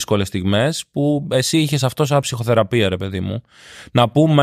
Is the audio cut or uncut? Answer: uncut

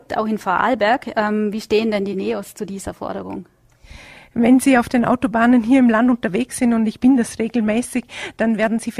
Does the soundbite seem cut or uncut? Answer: uncut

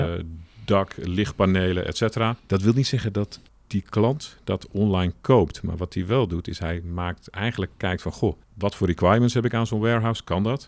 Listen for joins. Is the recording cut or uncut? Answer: cut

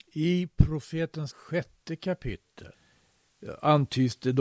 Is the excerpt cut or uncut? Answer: cut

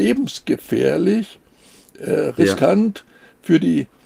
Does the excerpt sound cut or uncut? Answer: uncut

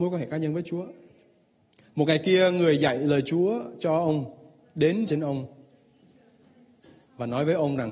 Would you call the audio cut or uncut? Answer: cut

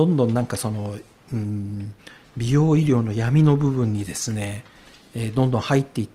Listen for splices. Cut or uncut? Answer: uncut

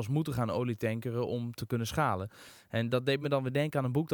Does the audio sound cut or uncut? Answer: uncut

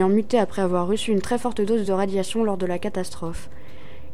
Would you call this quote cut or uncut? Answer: uncut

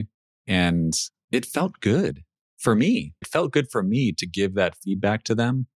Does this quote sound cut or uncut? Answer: uncut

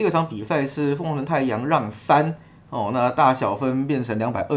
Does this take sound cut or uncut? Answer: uncut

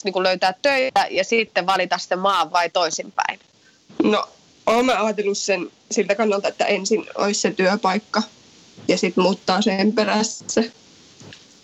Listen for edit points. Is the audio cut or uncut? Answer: cut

